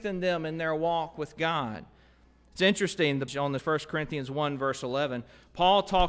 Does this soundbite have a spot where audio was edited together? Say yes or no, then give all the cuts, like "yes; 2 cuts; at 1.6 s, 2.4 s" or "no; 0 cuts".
yes; 2 cuts; at 3.3 s, 3.6 s